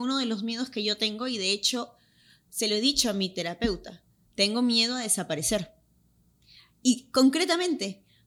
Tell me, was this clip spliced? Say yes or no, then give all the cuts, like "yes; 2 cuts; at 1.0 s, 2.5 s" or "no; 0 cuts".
no; 0 cuts